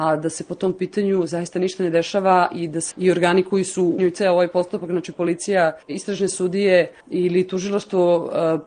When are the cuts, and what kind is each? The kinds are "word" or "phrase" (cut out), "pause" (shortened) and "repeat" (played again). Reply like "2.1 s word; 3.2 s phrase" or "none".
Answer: 2.9 s word; 4.0 s word; 5.8 s pause; 7.0 s pause